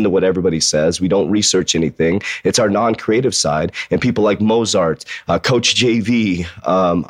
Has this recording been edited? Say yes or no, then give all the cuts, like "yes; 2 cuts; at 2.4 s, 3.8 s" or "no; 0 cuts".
no; 0 cuts